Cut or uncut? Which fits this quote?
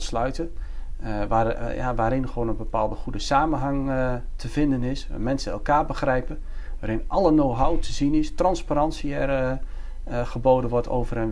uncut